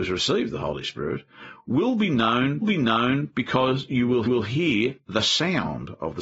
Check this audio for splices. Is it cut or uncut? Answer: cut